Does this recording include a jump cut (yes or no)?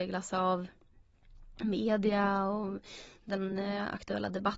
no